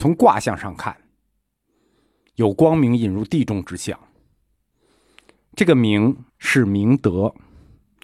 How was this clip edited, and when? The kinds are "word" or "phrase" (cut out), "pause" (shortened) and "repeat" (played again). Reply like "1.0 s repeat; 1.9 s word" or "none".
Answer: 6.3 s pause